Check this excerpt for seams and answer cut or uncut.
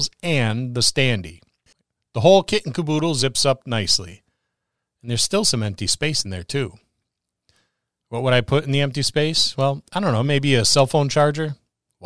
uncut